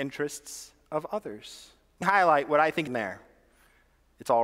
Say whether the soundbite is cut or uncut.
cut